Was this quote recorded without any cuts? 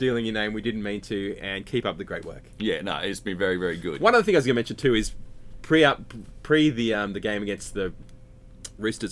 yes; 0 cuts

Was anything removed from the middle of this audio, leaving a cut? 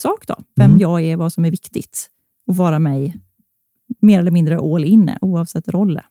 no; 0 cuts

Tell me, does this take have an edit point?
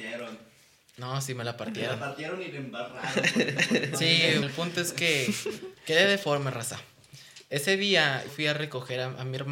yes; 4 cuts; at 3.6 s, 4.4 s, 5.8 s, 8.3 s

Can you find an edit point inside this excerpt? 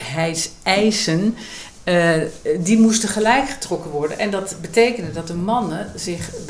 no; 0 cuts

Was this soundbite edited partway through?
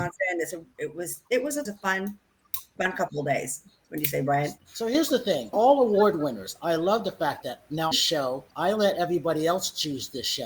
yes; 6 cuts; at 1.7 s, 4.6 s, 5.5 s, 7.4 s, 7.9 s, 8.5 s

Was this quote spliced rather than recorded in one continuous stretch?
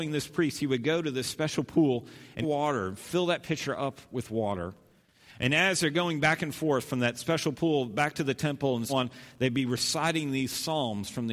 yes; 2 cuts; at 2.4 s, 8.9 s

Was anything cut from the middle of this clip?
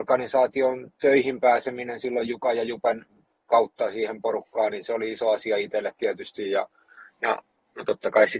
no; 0 cuts

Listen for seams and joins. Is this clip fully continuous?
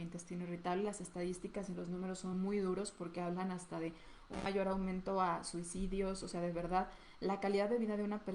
yes; 0 cuts

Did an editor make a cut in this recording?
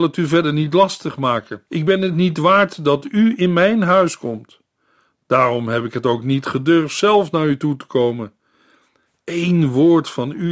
yes; 1 cut; at 1.7 s

